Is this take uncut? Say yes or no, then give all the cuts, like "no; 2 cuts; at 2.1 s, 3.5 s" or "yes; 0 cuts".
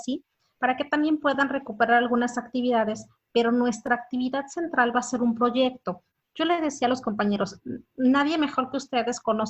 yes; 0 cuts